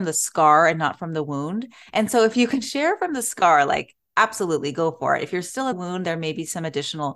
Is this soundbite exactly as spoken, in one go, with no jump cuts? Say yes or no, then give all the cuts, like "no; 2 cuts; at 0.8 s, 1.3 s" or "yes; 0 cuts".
no; 1 cut; at 5.7 s